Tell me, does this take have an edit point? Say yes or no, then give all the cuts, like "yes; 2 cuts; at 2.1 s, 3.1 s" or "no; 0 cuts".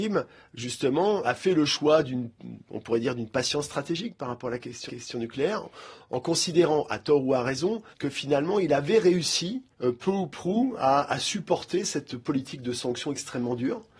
yes; 4 cuts; at 1.2 s, 4.9 s, 7.9 s, 9.7 s